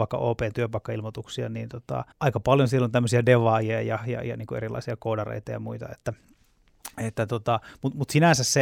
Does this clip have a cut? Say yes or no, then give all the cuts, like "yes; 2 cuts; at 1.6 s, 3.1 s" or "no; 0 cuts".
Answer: yes; 1 cut; at 2.1 s